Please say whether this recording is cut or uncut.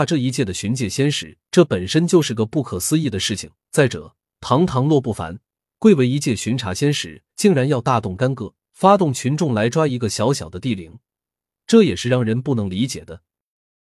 cut